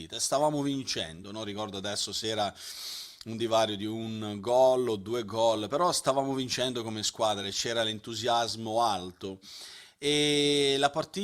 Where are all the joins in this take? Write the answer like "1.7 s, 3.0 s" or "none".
none